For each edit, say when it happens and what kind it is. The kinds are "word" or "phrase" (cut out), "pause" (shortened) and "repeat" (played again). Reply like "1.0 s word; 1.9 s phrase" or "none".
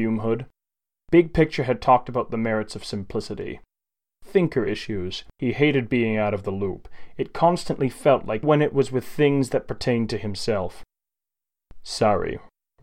5.3 s pause; 8.4 s phrase